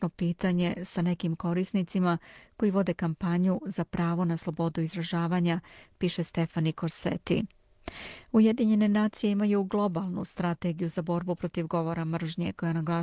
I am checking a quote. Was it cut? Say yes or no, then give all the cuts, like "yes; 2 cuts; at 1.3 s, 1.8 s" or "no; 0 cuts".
no; 0 cuts